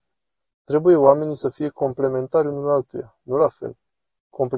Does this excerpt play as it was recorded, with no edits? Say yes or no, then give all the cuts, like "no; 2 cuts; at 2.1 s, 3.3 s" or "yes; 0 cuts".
yes; 0 cuts